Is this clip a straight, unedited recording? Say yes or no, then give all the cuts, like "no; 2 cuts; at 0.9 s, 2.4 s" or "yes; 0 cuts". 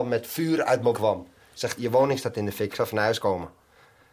no; 3 cuts; at 0.9 s, 1.8 s, 2.7 s